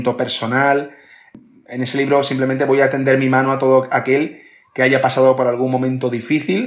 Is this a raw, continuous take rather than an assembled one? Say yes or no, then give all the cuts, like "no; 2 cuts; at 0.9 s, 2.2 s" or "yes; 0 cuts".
yes; 0 cuts